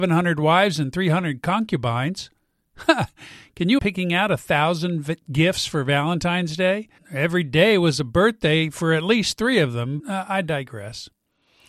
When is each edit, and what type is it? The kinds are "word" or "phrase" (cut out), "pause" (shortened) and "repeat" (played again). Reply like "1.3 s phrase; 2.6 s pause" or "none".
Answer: 3.8 s word; 7.0 s pause; 10.0 s word